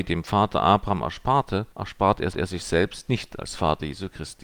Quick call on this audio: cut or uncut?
cut